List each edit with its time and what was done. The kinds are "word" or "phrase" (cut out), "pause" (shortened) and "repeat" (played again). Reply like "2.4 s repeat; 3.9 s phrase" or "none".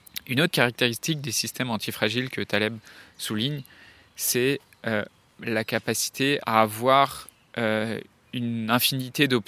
none